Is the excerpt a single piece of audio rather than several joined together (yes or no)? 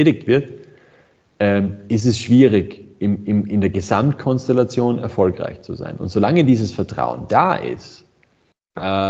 yes